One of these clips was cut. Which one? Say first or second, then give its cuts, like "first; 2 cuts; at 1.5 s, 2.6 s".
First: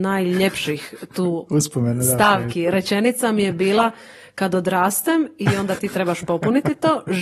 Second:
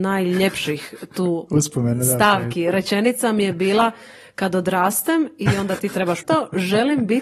second; 1 cut; at 6.2 s